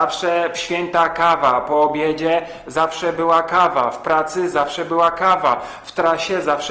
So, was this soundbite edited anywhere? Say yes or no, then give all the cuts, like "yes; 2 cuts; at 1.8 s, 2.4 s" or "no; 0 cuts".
no; 0 cuts